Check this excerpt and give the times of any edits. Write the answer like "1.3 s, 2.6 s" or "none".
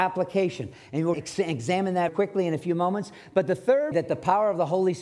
1.1 s, 2.1 s, 3.9 s